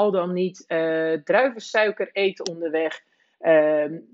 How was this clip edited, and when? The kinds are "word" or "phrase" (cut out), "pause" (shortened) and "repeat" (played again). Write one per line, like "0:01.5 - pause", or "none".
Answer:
none